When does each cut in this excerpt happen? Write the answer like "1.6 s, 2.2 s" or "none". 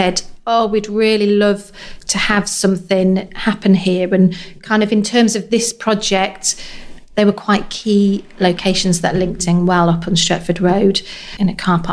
none

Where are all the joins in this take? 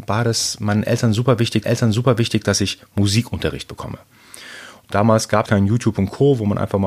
1.6 s, 5.5 s

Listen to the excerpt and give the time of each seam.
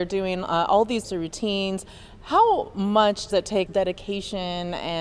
1.0 s, 3.3 s, 3.7 s

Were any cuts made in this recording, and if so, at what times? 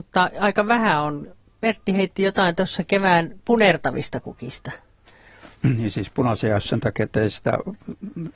6.6 s, 7.1 s

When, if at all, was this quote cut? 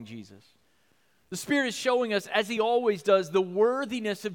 none

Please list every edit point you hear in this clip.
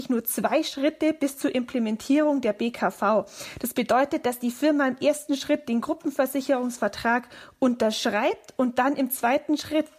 none

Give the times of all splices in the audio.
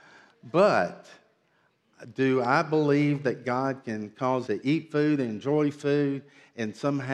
4.5 s

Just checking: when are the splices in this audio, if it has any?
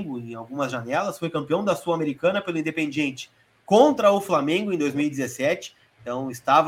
none

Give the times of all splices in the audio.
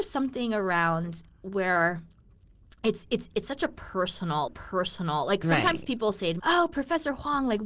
4.5 s, 6.4 s

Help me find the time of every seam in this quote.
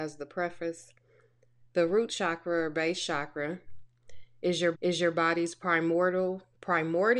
4.7 s

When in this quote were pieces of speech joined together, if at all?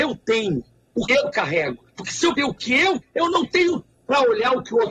1.1 s, 1.9 s, 2.4 s, 3.0 s, 3.9 s

